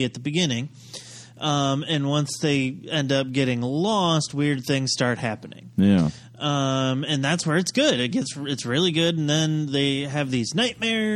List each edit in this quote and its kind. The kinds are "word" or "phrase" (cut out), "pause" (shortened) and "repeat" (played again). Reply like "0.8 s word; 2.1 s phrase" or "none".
none